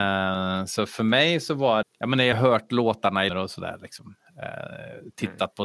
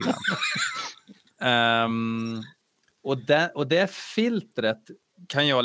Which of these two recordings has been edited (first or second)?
first